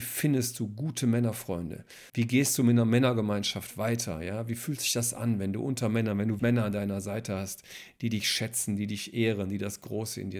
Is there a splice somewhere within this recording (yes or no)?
yes